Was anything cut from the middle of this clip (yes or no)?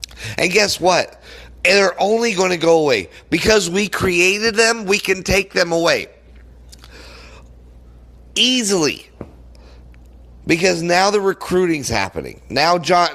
no